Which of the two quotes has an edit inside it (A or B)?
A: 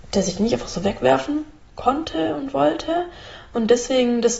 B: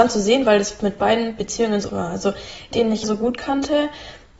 B